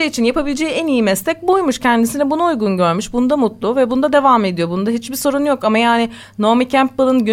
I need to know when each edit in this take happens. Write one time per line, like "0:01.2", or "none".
none